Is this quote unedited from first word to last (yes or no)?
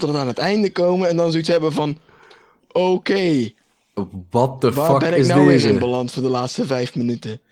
yes